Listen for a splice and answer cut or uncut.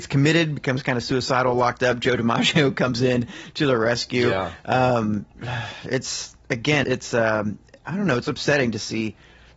cut